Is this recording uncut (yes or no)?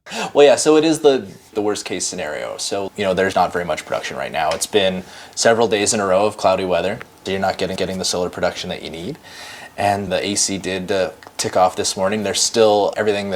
no